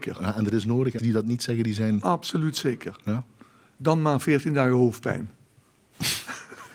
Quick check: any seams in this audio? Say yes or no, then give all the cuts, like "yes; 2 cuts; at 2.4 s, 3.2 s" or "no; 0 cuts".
yes; 1 cut; at 1.0 s